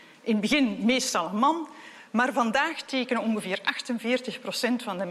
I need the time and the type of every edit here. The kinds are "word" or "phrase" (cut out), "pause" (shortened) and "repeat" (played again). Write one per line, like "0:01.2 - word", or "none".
none